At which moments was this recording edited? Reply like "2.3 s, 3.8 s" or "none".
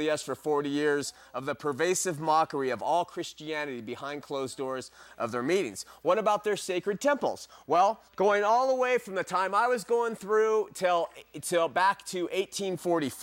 8.1 s

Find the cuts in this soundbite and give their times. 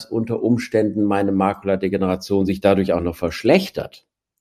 none

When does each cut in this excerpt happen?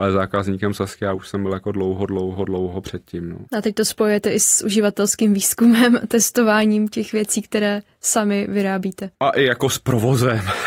3.5 s, 9.1 s

